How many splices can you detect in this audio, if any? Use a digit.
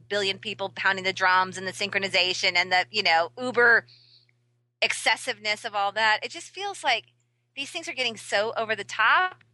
0